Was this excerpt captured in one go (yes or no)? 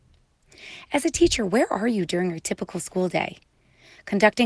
yes